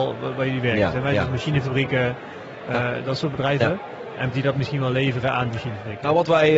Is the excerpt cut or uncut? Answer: cut